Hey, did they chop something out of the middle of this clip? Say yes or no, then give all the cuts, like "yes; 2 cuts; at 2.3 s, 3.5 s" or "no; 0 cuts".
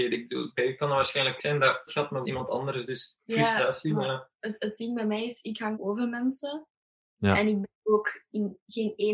yes; 4 cuts; at 1.4 s, 1.9 s, 2.2 s, 5.7 s